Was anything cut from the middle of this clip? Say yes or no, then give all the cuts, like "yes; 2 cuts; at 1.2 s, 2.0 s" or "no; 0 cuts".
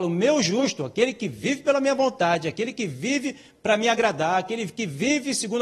no; 0 cuts